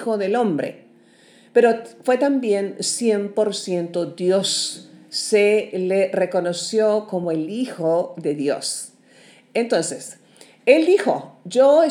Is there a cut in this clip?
no; 0 cuts

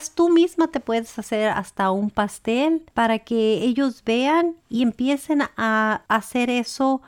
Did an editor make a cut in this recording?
no; 0 cuts

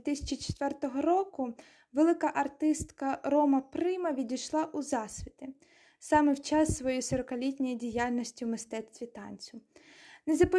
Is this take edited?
no; 0 cuts

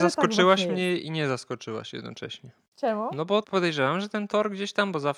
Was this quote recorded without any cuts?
no; 1 cut; at 3.4 s

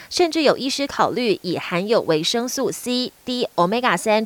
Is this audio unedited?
yes; 0 cuts

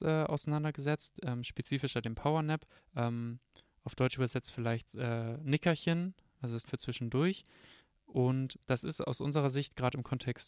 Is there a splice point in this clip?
yes; 3 cuts; at 2.8 s, 6.7 s, 8.6 s

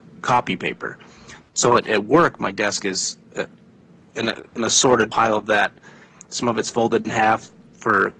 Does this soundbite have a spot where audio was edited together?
no; 0 cuts

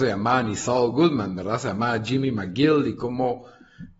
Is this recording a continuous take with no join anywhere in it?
yes; 0 cuts

